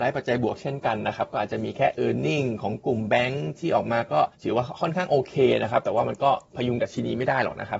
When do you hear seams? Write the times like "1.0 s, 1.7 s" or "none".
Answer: 4.3 s